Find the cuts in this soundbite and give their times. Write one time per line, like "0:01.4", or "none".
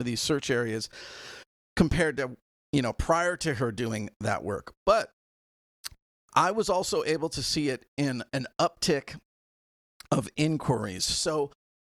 none